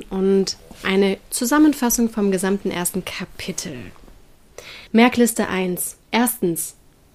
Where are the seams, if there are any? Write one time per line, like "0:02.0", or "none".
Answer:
0:04.9
0:06.0